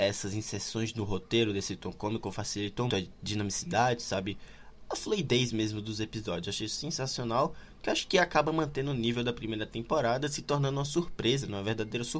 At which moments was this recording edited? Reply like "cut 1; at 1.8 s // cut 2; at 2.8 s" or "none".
cut 1; at 2.9 s